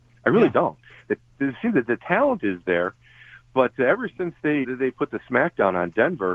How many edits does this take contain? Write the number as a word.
one